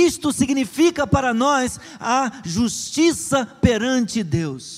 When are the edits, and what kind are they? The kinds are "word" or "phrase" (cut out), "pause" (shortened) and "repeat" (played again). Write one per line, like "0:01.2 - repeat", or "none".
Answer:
none